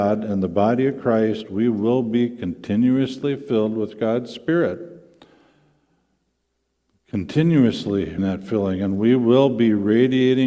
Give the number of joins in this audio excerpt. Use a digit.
1